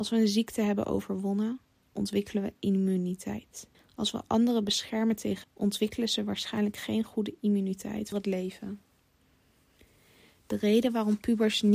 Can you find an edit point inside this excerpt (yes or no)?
yes